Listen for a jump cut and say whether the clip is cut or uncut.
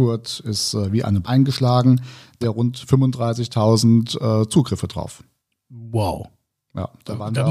cut